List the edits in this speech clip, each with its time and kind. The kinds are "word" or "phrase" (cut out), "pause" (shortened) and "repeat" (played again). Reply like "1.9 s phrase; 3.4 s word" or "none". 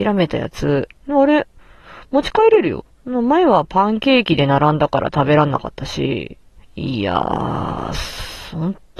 1.0 s pause; 2.9 s pause; 6.6 s pause